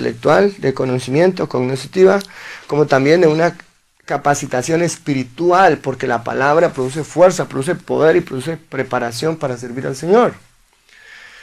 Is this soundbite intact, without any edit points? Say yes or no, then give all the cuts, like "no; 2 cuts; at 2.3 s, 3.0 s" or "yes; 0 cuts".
yes; 0 cuts